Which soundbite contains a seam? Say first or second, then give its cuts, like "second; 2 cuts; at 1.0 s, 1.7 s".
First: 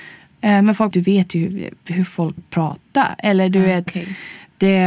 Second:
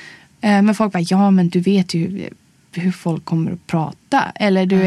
first; 4 cuts; at 0.9 s, 1.8 s, 2.4 s, 3.9 s